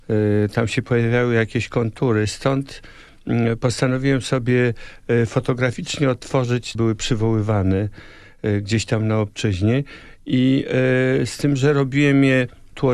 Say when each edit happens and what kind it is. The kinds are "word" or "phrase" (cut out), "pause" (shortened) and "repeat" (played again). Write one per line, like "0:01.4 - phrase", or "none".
0:06.7 - phrase

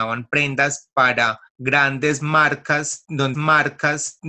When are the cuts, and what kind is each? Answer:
0:01.5 - pause
0:03.3 - repeat

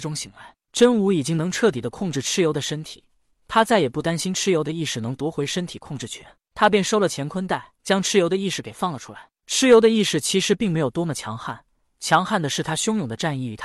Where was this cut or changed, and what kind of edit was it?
0:07.8 - pause

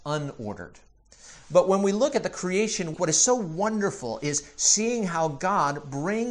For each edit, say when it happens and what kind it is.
0:02.9 - word

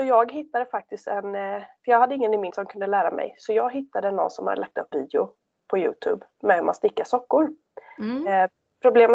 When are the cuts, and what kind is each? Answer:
0:02.5 - word
0:04.9 - word

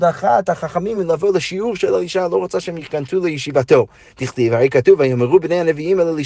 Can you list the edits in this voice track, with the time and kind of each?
none

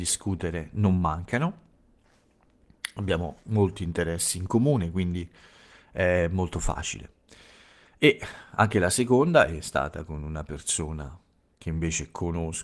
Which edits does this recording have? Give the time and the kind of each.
none

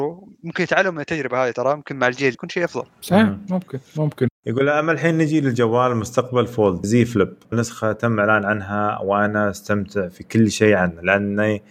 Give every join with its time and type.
0:02.3 - word
0:02.9 - pause
0:06.8 - word
0:07.5 - phrase

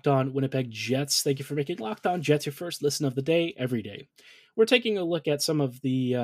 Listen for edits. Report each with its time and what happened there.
none

